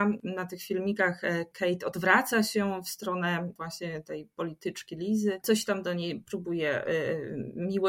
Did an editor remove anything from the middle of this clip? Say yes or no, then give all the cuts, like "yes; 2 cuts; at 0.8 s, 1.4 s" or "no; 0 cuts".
no; 0 cuts